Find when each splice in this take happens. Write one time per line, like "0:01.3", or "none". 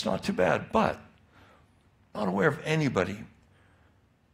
0:02.1